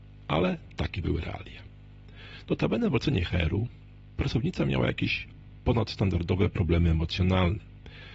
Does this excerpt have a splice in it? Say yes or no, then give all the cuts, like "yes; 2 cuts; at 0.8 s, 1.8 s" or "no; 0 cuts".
no; 0 cuts